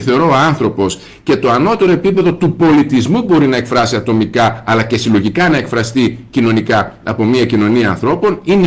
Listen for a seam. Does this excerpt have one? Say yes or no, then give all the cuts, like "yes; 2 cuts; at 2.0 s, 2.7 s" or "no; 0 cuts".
no; 0 cuts